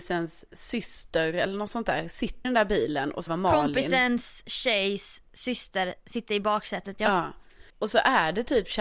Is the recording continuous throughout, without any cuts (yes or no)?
no